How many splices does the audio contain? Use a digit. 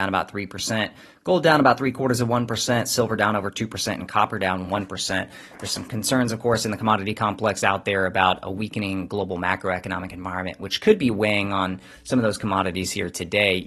0